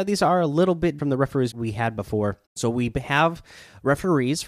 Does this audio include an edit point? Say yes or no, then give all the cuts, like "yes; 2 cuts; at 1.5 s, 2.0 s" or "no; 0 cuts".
yes; 3 cuts; at 1.0 s, 1.5 s, 2.5 s